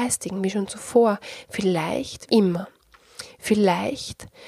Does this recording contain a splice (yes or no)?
yes